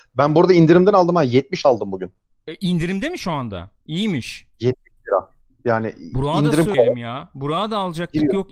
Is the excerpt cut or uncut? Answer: cut